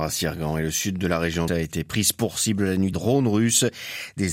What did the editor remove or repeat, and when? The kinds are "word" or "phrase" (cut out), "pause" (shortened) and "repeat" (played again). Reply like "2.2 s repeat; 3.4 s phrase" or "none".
1.5 s word; 2.9 s phrase